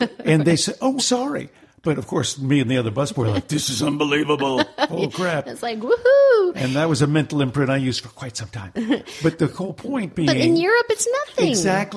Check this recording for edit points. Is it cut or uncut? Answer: cut